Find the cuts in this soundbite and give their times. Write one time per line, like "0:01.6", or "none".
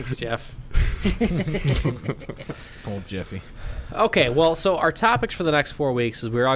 none